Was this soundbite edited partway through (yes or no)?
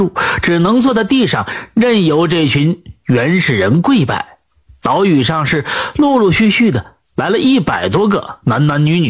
yes